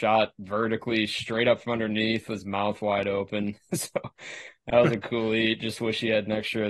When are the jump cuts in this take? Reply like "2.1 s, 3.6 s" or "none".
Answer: none